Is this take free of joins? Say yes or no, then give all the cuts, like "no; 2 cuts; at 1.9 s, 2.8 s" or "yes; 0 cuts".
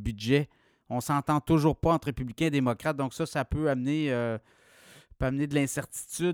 yes; 0 cuts